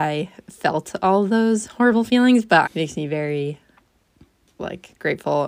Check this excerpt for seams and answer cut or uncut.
cut